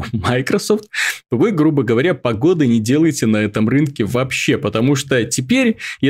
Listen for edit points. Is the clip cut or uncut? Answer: uncut